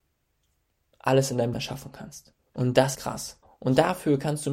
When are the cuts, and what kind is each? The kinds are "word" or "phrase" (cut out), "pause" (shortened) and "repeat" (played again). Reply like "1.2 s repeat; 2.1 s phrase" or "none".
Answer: 1.5 s word; 2.4 s pause; 2.9 s word; 3.4 s pause